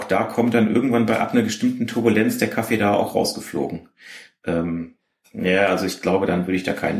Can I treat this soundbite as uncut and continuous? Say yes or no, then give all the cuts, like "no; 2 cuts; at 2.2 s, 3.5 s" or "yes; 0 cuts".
yes; 0 cuts